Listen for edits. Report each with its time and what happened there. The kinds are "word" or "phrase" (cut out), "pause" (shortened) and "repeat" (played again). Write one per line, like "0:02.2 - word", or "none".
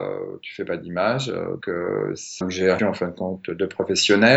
0:01.6 - word
0:02.4 - word
0:02.8 - word